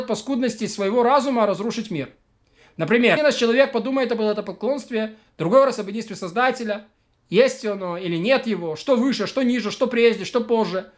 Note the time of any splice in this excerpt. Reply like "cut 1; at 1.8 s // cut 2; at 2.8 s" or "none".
cut 1; at 3.2 s